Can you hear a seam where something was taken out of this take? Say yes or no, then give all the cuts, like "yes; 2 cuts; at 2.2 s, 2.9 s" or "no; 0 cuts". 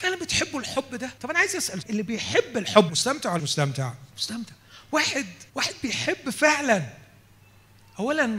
yes; 6 cuts; at 1.2 s, 1.8 s, 2.9 s, 3.4 s, 4.1 s, 5.5 s